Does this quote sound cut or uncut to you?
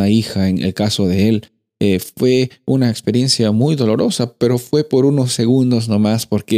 uncut